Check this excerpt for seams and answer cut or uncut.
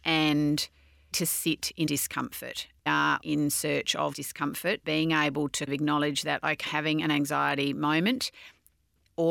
cut